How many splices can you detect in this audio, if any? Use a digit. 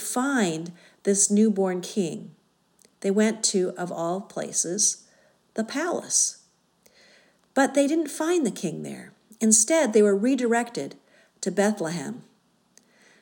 0